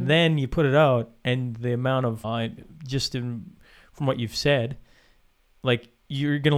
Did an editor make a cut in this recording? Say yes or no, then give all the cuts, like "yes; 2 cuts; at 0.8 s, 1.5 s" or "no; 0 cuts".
yes; 1 cut; at 2.2 s